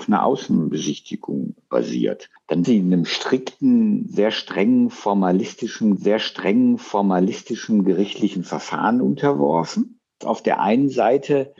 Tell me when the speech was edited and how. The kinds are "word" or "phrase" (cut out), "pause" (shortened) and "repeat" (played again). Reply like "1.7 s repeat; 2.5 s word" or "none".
2.6 s word; 6.0 s repeat; 10.2 s word